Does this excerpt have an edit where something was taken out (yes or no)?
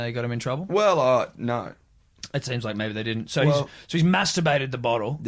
no